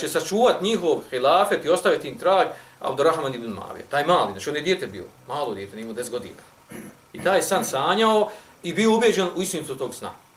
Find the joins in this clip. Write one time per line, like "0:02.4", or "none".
0:05.2